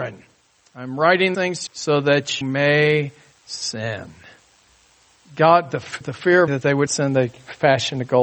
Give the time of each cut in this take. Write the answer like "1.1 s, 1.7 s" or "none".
1.3 s, 1.7 s, 2.4 s, 3.3 s, 6.0 s, 6.5 s, 6.9 s